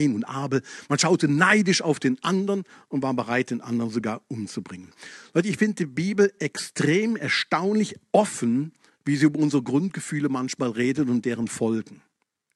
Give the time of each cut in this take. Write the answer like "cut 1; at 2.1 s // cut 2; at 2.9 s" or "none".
cut 1; at 8.9 s